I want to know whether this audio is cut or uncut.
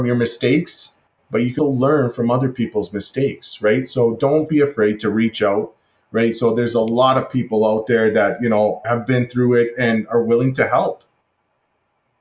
cut